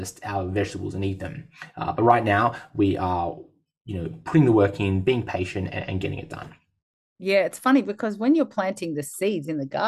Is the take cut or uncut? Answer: uncut